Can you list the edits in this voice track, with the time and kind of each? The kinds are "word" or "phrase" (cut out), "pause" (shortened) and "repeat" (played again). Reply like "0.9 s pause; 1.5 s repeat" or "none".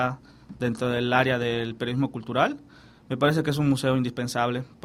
none